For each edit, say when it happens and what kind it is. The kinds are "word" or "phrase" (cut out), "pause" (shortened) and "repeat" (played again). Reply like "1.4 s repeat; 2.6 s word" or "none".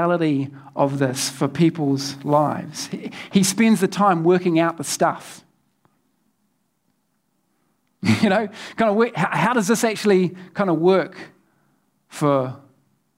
none